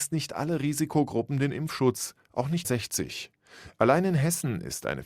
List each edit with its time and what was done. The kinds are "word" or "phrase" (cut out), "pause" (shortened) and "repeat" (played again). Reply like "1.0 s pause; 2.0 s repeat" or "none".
2.6 s phrase